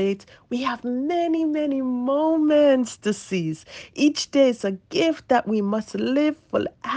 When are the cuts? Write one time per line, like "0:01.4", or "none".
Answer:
none